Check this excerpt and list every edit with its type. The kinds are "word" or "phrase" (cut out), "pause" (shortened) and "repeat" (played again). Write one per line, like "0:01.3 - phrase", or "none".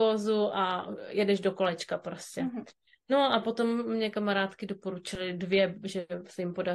none